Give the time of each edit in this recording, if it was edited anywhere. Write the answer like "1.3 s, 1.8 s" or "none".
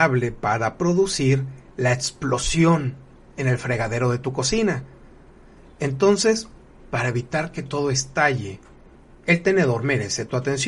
none